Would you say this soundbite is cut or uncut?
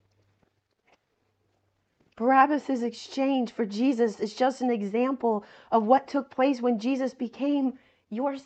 uncut